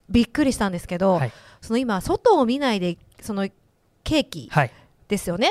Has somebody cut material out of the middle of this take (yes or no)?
no